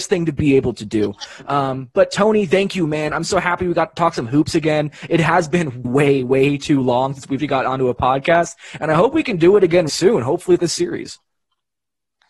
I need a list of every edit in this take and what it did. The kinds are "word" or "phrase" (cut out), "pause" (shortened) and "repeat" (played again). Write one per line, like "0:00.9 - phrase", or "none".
0:05.8 - word
0:07.4 - word
0:09.9 - word
0:10.6 - word

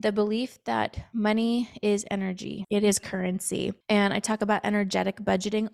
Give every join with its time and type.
none

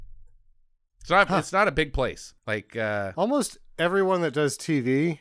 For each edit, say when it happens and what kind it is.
0:02.4 - pause

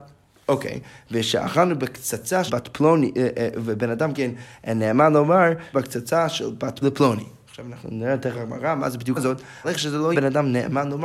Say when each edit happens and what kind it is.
0:02.5 - word
0:04.1 - word
0:05.7 - word
0:06.8 - word
0:08.3 - word
0:09.2 - word
0:09.6 - word
0:10.1 - word

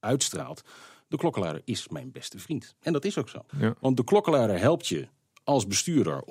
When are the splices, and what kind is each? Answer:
0:03.5 - pause

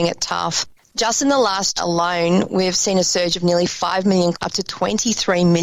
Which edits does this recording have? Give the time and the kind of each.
0:01.8 - word
0:04.3 - word

